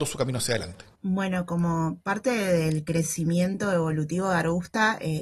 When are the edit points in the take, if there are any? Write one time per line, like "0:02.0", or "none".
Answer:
0:00.9

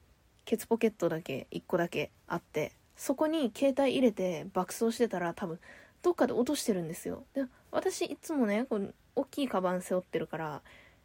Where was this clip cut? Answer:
0:02.2
0:07.3

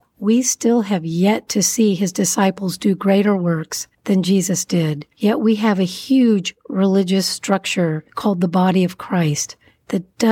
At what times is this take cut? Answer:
0:03.9
0:05.1

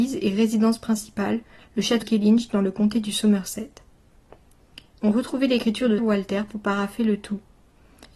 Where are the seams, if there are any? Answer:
0:02.0
0:06.0

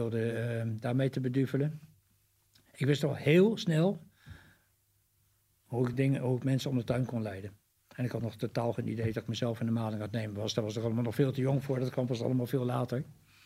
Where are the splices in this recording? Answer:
none

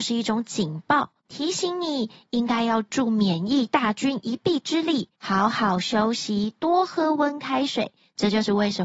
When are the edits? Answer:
0:01.2
0:05.1

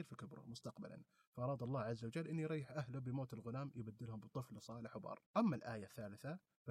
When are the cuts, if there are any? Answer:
0:05.3

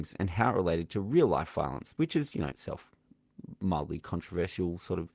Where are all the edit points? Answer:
0:02.5

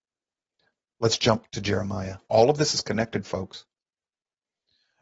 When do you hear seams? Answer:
0:01.5
0:02.2

